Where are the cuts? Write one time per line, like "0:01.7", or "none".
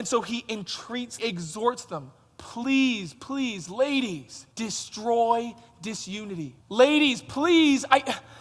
0:01.2
0:03.1
0:04.5
0:06.6